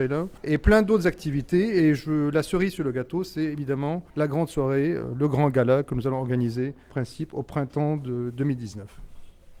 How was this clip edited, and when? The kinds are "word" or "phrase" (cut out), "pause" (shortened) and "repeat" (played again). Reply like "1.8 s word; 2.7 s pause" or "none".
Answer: 4.1 s pause; 6.9 s word